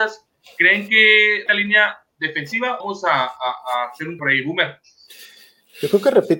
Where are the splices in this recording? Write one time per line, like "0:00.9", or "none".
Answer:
0:01.5
0:02.8
0:04.2